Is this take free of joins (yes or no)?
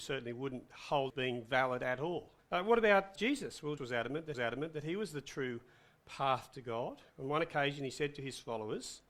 no